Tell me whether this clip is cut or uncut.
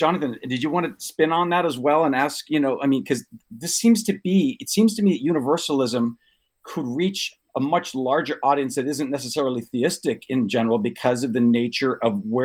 uncut